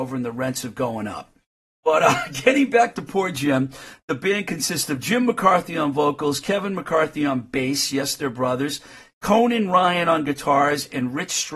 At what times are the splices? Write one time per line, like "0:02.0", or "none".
none